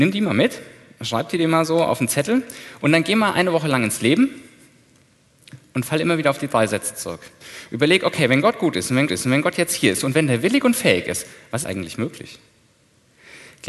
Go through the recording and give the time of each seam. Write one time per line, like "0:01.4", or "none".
0:09.1
0:11.6